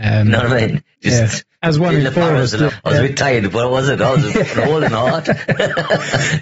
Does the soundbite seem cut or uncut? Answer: cut